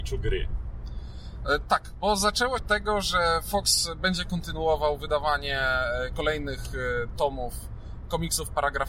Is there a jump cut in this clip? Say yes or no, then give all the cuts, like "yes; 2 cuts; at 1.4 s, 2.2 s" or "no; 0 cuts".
yes; 1 cut; at 2.6 s